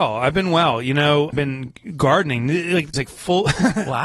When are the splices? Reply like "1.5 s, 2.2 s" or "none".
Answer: 1.3 s, 2.9 s